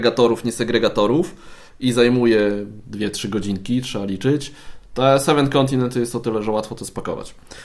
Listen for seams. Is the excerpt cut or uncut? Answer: cut